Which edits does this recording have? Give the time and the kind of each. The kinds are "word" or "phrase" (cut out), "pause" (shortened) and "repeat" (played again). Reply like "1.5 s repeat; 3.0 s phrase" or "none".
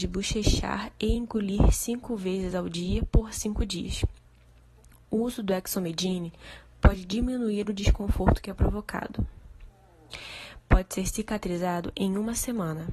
none